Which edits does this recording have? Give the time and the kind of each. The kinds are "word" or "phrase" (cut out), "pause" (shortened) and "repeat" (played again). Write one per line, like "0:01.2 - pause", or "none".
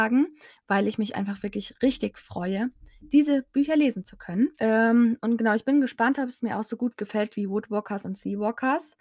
0:04.5 - pause